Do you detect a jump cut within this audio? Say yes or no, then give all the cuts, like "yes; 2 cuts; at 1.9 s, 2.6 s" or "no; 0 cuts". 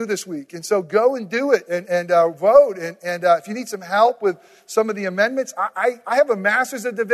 no; 0 cuts